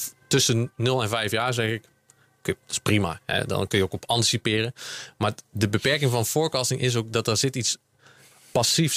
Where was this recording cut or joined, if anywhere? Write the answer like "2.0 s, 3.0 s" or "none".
none